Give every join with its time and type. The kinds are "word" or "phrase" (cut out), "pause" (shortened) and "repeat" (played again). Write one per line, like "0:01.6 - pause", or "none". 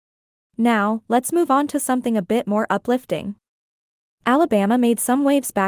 none